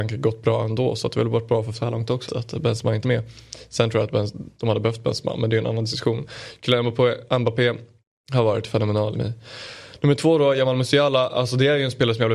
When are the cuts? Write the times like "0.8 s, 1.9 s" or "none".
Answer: 1.7 s, 2.3 s, 3.0 s, 9.1 s

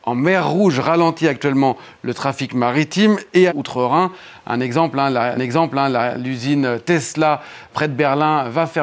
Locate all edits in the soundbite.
3.5 s, 5.4 s, 7.7 s

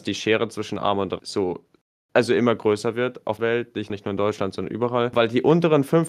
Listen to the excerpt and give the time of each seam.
1.2 s, 3.4 s, 3.9 s

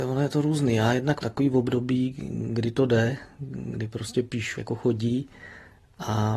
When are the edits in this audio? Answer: 1.2 s, 4.6 s

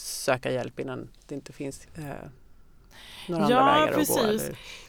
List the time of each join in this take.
1.9 s

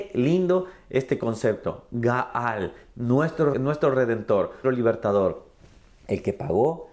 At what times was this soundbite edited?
3.5 s, 4.6 s

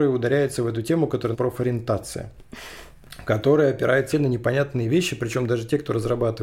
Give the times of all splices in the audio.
1.3 s, 4.1 s

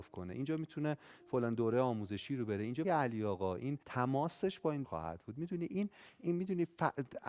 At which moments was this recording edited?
2.8 s, 3.8 s, 4.8 s

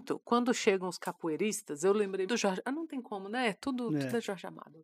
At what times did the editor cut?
2.3 s

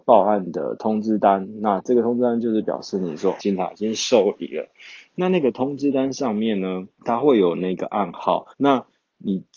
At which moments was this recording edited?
3.4 s, 6.9 s, 8.5 s

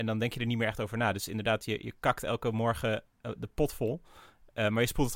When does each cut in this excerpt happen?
none

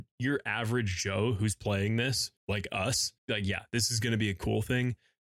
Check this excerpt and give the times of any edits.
2.4 s, 3.2 s

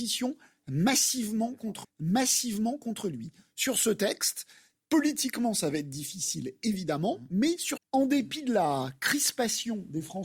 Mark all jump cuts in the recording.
1.8 s, 7.8 s

